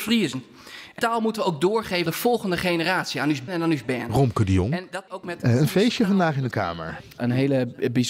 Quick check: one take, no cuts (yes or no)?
no